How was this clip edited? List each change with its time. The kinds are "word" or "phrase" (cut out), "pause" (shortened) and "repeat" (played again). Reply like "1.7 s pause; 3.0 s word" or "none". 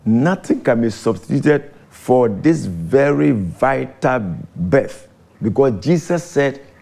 1.8 s pause; 4.5 s pause